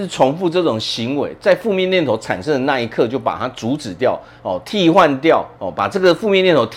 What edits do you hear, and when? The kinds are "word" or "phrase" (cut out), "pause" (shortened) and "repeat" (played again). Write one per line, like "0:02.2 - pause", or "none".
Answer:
0:05.6 - pause

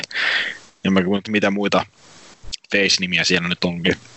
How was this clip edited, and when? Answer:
0:01.2 - phrase

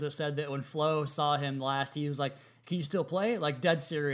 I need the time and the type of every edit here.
none

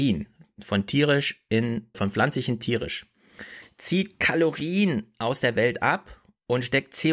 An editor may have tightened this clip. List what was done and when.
0:01.9 - word

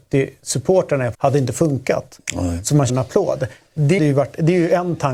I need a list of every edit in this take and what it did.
0:01.1 - word
0:02.9 - word
0:04.0 - word

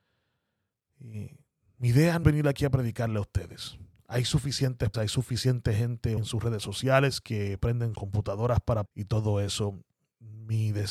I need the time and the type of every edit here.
0:02.2 - word
0:04.9 - word
0:06.2 - word
0:07.9 - word
0:08.9 - word

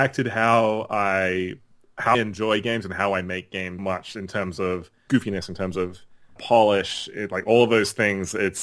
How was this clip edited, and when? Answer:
0:02.1 - word
0:03.8 - word
0:05.1 - word
0:06.4 - word

